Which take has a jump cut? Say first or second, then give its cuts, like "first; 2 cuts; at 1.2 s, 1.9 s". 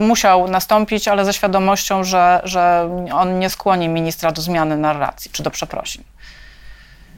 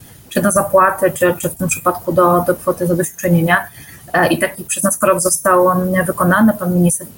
second; 1 cut; at 2.6 s